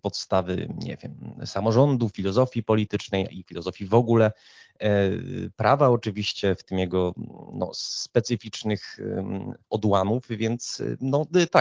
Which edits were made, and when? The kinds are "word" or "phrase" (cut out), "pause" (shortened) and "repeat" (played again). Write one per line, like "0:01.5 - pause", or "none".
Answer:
0:09.6 - pause